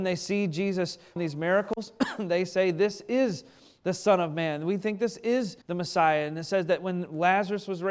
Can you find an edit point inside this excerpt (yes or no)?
yes